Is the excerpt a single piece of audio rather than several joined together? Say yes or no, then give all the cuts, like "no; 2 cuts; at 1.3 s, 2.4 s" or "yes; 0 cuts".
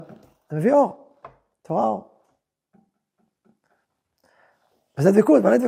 yes; 0 cuts